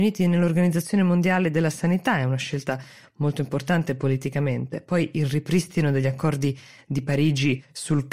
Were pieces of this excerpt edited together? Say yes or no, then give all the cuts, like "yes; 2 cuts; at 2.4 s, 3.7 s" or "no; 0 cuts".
no; 0 cuts